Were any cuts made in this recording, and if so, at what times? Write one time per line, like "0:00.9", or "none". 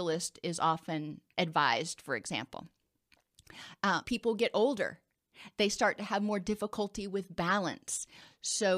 0:01.3
0:04.0

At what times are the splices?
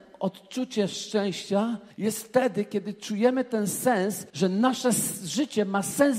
0:01.9
0:04.3

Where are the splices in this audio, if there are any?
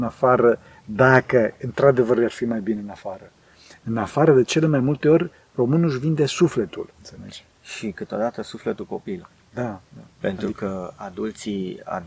0:06.9
0:10.1

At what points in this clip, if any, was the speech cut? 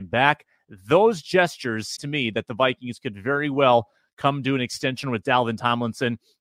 0:02.0

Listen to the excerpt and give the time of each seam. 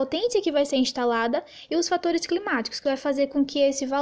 none

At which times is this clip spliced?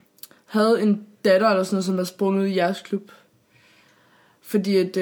none

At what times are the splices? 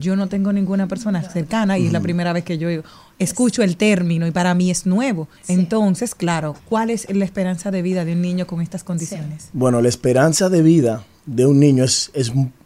0:05.4
0:06.6

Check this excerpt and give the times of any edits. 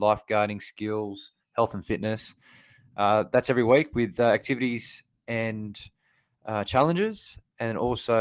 none

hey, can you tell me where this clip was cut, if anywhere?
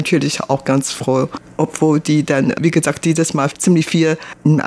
none

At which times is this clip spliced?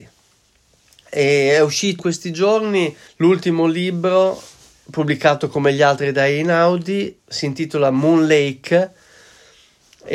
0:02.0
0:03.1
0:07.2

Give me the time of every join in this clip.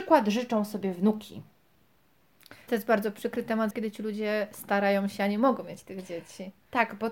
0:02.7
0:03.7

